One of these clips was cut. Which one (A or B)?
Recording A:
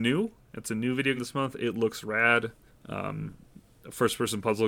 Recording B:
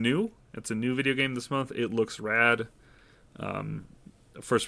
A